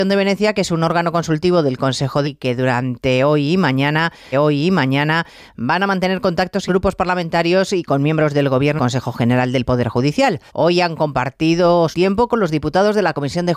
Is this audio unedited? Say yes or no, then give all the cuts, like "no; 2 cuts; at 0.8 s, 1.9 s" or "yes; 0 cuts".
no; 6 cuts; at 2.2 s, 4.3 s, 6.7 s, 8.8 s, 10.5 s, 11.9 s